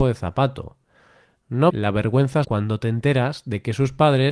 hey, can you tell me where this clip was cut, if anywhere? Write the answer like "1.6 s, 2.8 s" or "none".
1.7 s, 2.4 s

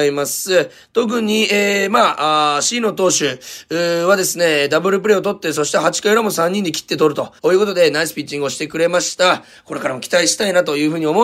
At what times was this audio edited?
7.4 s

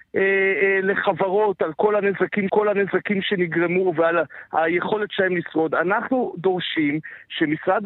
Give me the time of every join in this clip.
2.5 s

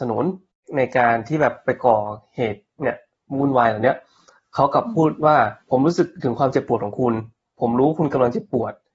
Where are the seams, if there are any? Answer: 5.6 s

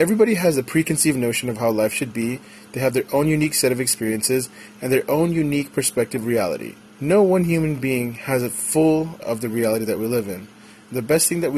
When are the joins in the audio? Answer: 6.2 s, 6.9 s, 9.2 s

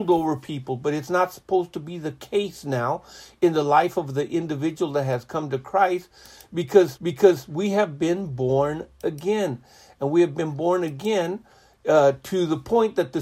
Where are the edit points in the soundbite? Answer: 7.0 s

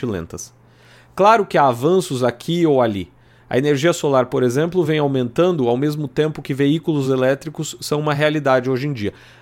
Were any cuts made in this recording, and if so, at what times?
none

